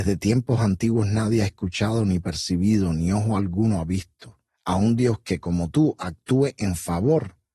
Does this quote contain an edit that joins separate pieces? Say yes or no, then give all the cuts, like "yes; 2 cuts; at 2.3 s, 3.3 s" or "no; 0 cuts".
yes; 1 cut; at 4.5 s